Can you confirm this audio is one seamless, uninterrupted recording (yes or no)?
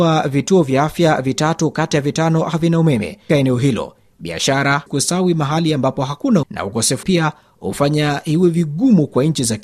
no